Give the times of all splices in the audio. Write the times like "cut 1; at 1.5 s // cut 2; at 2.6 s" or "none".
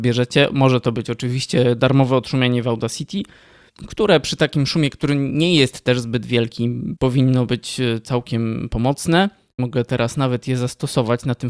none